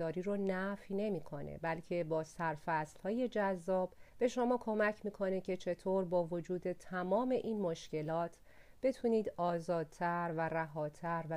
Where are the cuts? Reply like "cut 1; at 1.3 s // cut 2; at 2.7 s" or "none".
cut 1; at 4.1 s